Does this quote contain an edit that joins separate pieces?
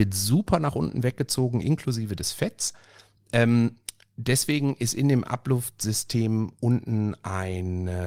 no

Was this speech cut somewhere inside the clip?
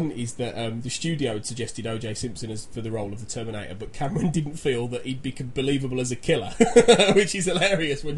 no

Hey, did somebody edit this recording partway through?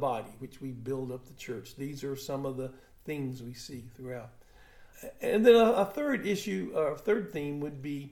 no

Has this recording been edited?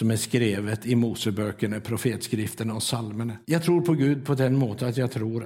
yes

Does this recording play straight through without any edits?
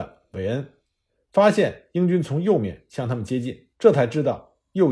no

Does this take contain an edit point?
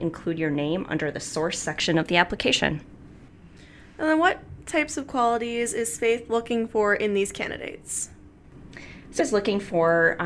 yes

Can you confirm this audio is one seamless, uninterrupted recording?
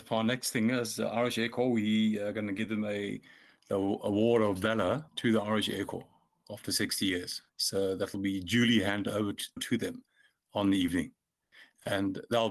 no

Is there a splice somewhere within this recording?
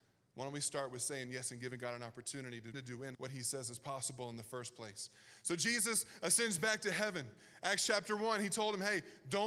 yes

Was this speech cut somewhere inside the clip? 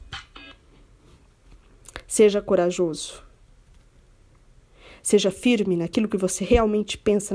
no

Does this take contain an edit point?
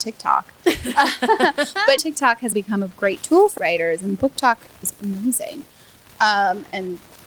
yes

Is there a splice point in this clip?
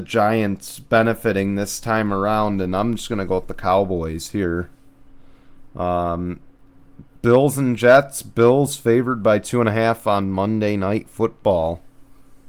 no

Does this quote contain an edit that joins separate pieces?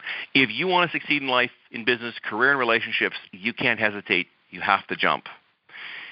no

